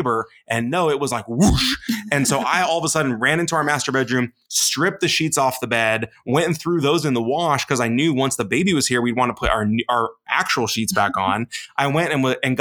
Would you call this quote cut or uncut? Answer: uncut